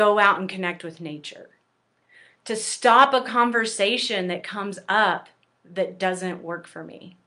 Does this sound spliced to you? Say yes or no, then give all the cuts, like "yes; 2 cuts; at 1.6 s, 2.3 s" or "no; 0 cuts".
no; 0 cuts